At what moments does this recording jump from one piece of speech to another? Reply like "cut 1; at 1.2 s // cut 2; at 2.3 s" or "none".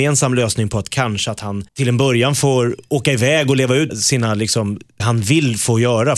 cut 1; at 1.7 s // cut 2; at 3.9 s // cut 3; at 5.0 s